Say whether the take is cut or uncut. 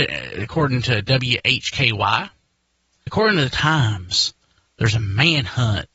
cut